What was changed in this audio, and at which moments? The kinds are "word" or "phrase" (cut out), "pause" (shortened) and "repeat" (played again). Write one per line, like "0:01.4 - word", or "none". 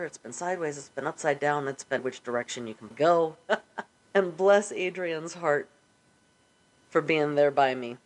0:02.0 - word
0:02.9 - word
0:04.0 - pause